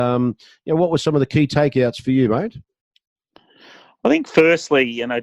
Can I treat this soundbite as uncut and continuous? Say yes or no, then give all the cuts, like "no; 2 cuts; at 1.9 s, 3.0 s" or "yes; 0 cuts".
yes; 0 cuts